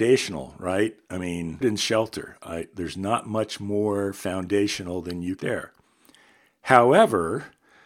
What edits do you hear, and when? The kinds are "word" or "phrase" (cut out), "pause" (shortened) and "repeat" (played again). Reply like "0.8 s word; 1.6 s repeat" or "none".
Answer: 1.6 s word; 5.4 s phrase